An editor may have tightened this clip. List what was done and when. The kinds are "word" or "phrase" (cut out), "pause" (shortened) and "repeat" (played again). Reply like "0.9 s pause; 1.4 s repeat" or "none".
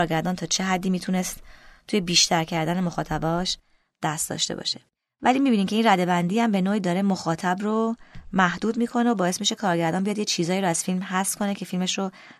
none